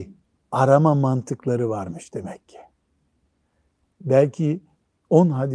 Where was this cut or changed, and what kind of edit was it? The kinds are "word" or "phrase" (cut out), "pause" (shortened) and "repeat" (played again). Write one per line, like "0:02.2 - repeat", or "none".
none